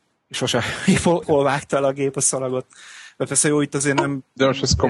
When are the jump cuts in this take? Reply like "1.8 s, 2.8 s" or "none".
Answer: 1.2 s